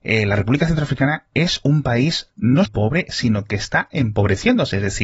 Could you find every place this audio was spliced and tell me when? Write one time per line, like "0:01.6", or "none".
0:02.7